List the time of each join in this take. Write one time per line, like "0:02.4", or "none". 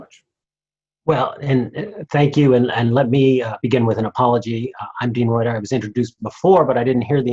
none